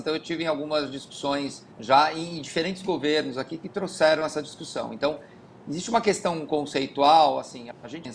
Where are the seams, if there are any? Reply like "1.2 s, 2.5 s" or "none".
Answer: 1.7 s